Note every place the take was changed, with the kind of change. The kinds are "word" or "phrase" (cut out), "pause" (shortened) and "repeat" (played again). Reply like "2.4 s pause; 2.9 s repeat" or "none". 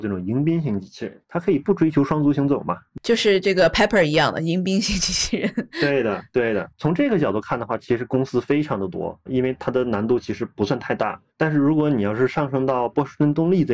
1.2 s pause; 6.7 s pause